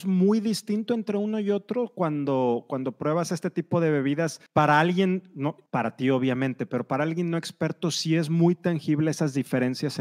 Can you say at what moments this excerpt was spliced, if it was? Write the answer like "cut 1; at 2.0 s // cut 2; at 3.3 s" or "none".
cut 1; at 4.5 s // cut 2; at 5.7 s